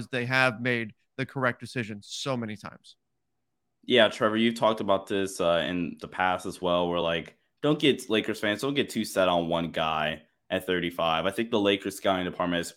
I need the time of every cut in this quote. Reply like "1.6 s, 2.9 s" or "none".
none